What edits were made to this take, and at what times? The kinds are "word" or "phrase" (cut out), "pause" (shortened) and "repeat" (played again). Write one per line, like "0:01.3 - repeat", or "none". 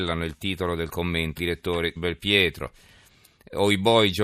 0:01.4 - word
0:02.0 - word